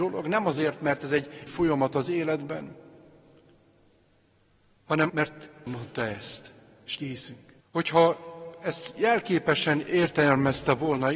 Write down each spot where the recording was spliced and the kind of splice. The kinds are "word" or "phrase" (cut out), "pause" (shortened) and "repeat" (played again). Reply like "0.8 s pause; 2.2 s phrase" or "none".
1.5 s word; 5.1 s word; 5.7 s phrase; 7.0 s word; 7.6 s pause